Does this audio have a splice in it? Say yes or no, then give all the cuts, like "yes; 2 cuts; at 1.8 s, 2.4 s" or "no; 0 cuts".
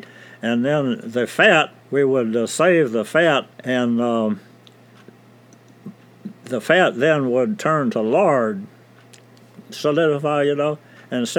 yes; 2 cuts; at 1.8 s, 3.5 s